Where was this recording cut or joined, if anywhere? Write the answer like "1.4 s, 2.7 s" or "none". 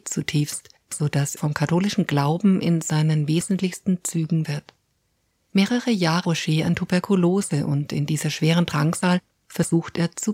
1.4 s, 4.4 s, 6.2 s